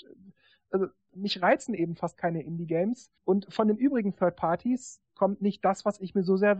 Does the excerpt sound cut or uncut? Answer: cut